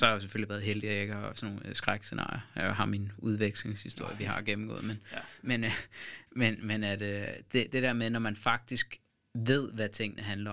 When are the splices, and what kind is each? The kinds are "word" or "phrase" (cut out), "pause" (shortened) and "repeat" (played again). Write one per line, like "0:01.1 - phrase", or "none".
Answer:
none